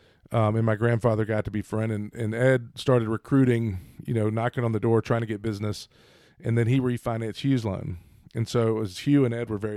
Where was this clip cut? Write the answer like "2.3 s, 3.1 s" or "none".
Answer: none